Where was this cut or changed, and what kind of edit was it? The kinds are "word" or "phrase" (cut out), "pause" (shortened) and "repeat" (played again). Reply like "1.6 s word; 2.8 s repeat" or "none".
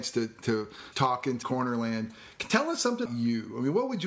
0.9 s word; 1.4 s phrase; 3.1 s word